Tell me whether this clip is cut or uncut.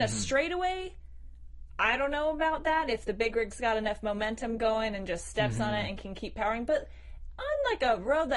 uncut